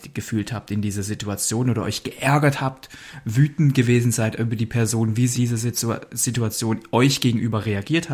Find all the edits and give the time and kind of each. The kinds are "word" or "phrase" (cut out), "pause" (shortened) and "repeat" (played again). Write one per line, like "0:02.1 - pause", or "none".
0:05.3 - word